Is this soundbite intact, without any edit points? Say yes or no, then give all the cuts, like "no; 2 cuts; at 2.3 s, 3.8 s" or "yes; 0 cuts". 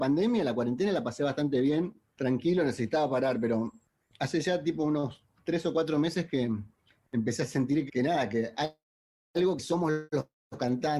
no; 2 cuts; at 7.9 s, 8.5 s